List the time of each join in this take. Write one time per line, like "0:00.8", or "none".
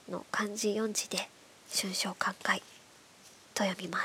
0:02.8